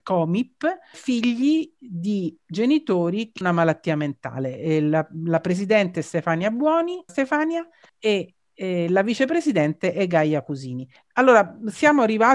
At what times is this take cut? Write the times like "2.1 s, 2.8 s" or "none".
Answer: 0.9 s, 3.4 s, 7.1 s, 7.9 s, 11.0 s

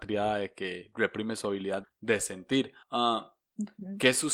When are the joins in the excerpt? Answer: 1.8 s, 2.8 s

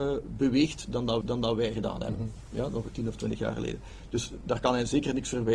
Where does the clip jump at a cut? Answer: 1.2 s

